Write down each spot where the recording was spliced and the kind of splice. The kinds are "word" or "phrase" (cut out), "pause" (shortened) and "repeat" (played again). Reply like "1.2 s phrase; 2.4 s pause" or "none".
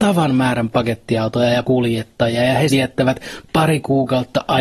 1.6 s word; 2.7 s word